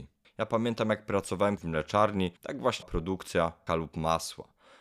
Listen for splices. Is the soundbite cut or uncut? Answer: cut